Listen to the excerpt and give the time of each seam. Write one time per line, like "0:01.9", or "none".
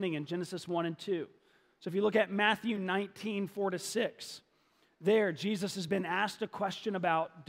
none

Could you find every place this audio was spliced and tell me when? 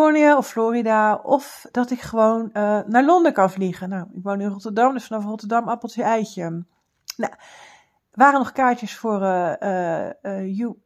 none

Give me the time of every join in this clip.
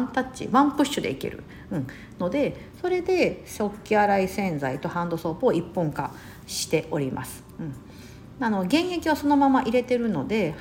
none

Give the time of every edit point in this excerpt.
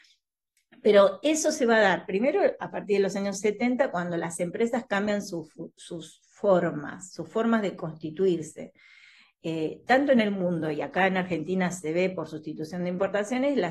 none

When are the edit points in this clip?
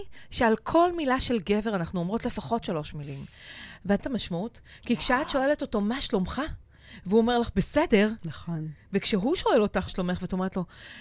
0:04.0
0:09.9

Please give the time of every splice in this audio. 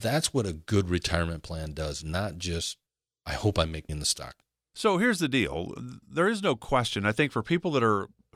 0:03.9

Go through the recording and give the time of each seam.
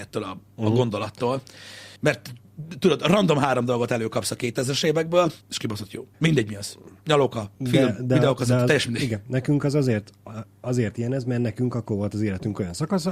0:02.0
0:05.4
0:06.1
0:07.6

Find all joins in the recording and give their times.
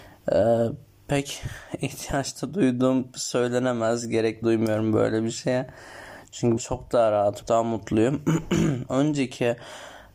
0:04.4
0:06.6
0:07.4
0:08.9

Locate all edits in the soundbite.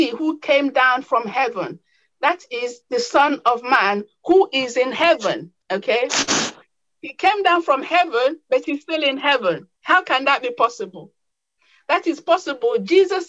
0:05.6
0:09.8

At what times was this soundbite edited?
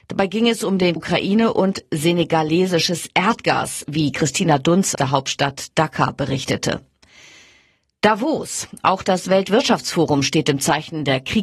0:01.0
0:04.9

